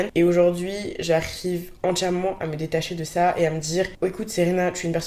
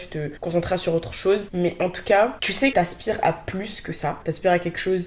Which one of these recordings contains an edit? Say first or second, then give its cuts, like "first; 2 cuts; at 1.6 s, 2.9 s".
second; 1 cut; at 2.7 s